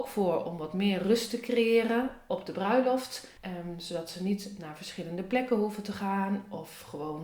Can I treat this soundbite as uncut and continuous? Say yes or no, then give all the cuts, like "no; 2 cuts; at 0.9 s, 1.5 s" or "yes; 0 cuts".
no; 1 cut; at 3.4 s